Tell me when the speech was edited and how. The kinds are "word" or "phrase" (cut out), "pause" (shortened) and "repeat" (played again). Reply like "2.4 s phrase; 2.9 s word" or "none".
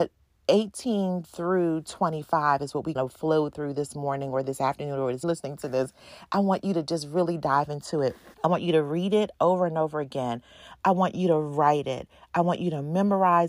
3.0 s word; 5.2 s phrase; 8.3 s pause